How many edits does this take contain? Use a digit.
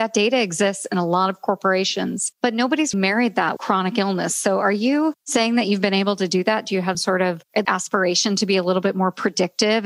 4